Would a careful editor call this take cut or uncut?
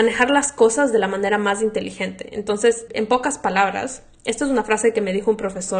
cut